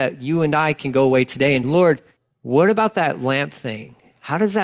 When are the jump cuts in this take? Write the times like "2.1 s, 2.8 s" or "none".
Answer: 1.6 s, 2.2 s